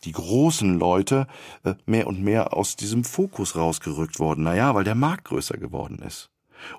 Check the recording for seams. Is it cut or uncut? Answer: cut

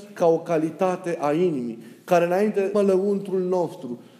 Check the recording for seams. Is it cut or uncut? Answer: cut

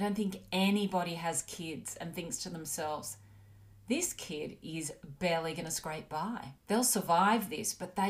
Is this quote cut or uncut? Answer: cut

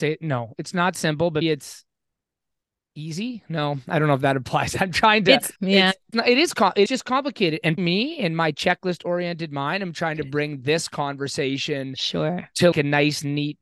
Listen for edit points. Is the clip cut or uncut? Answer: cut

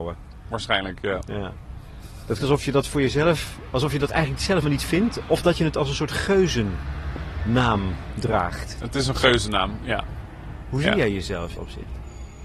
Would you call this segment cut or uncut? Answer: cut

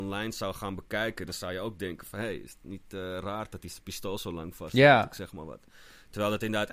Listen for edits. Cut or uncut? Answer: uncut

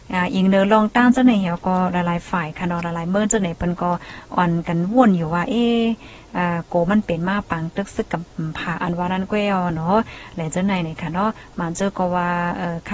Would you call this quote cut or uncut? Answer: uncut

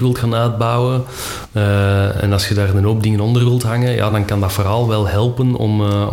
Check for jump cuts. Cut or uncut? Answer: uncut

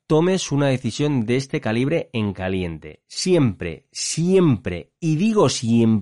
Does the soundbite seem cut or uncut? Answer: uncut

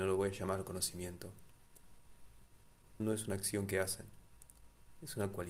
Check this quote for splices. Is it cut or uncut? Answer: cut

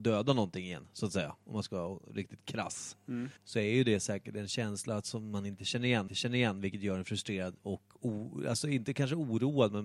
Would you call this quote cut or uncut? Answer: cut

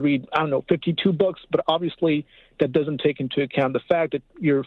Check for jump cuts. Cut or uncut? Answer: uncut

